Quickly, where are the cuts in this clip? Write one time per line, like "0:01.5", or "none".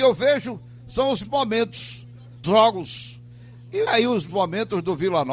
0:01.2
0:02.4
0:03.9
0:04.3